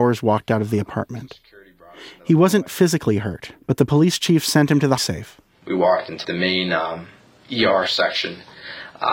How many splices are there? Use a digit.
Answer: 3